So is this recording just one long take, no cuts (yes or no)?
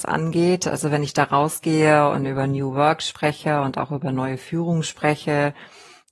yes